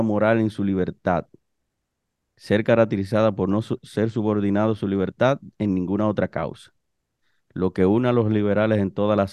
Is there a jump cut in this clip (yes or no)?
no